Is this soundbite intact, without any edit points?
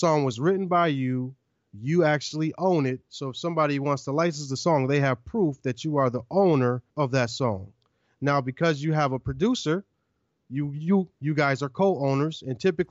no; 1 cut; at 6.9 s

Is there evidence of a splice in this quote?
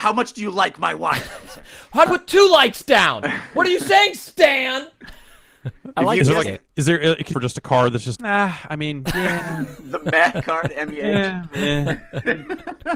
yes; 4 cuts; at 2.1 s, 6.7 s, 7.3 s, 8.2 s

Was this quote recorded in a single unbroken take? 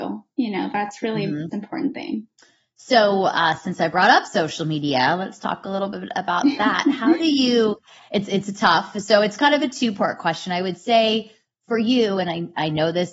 no; 2 cuts; at 1.5 s, 2.4 s

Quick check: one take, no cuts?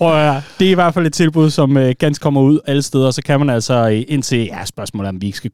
no; 1 cut; at 2.2 s

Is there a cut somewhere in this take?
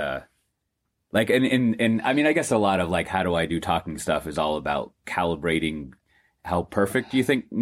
no; 0 cuts

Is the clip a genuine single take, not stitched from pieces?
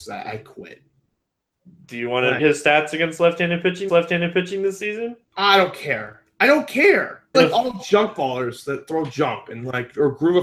no; 3 cuts; at 2.4 s, 3.9 s, 7.3 s

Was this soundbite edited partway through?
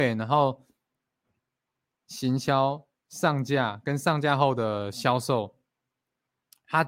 no; 0 cuts

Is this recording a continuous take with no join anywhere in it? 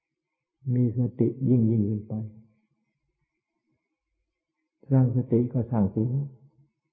yes; 0 cuts

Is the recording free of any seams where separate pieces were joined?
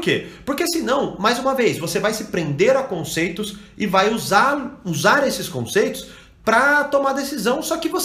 yes; 0 cuts

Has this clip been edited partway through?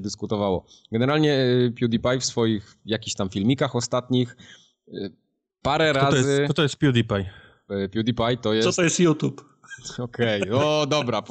no; 0 cuts

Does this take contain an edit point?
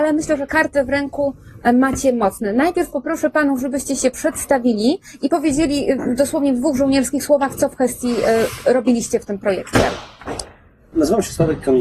no; 0 cuts

